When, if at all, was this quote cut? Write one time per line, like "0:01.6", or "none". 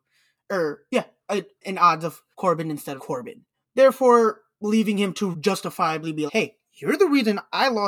0:01.6
0:02.3
0:03.0
0:03.5
0:05.3
0:06.3